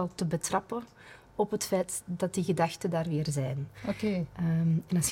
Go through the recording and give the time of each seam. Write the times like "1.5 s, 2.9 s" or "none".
none